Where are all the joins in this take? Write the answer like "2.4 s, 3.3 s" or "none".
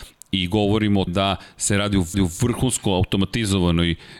1.1 s, 2.1 s